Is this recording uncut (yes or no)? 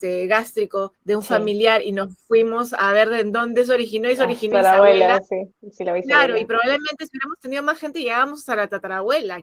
no